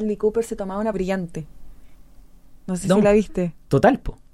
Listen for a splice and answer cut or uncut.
cut